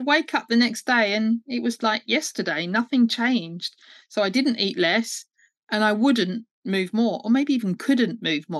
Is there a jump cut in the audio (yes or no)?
yes